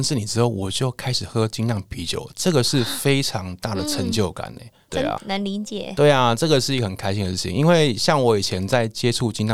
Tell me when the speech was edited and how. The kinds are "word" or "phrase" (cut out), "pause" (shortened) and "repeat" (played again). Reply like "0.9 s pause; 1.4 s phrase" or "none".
5.2 s word